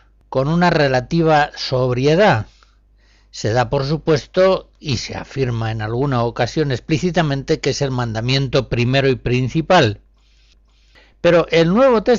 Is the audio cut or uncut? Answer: uncut